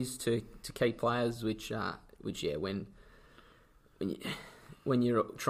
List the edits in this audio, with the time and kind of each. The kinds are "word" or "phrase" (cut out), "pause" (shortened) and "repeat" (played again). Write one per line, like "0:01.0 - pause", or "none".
none